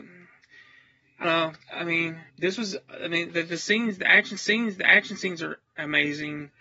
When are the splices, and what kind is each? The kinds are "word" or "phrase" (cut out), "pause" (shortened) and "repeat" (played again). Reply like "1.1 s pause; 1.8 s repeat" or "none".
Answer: 1.2 s word; 1.6 s pause; 2.3 s pause; 3.3 s word; 4.4 s repeat

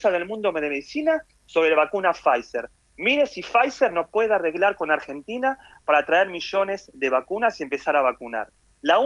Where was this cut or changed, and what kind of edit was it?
none

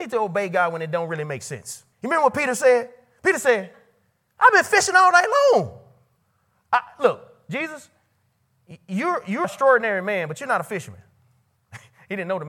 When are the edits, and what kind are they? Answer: 1.9 s pause; 9.4 s word

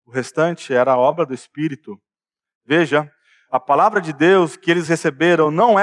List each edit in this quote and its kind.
none

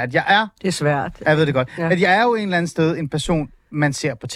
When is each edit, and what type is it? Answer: none

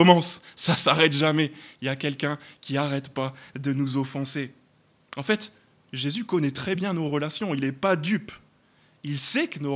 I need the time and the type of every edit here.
none

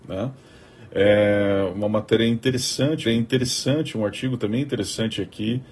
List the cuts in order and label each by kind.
3.1 s repeat

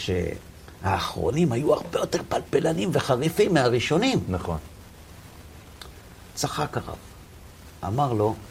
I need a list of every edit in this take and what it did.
none

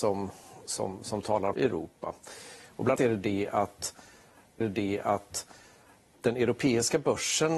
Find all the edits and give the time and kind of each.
1.5 s word; 3.0 s word; 4.6 s repeat

